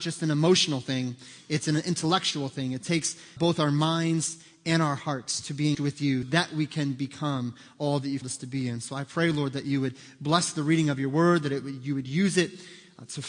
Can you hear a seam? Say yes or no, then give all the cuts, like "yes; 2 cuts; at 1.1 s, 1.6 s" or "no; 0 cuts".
yes; 4 cuts; at 3.4 s, 5.7 s, 6.2 s, 8.2 s